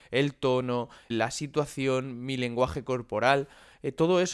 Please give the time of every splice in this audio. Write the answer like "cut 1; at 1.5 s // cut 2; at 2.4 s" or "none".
cut 1; at 1.1 s